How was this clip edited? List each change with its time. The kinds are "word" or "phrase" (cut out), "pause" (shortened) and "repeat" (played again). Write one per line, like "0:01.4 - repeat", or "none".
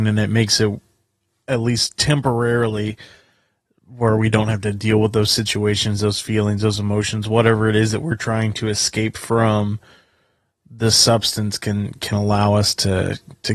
none